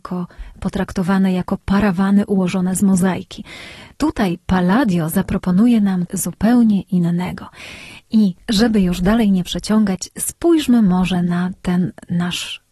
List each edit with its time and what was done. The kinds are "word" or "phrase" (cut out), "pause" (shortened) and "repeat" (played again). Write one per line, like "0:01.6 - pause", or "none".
0:06.1 - word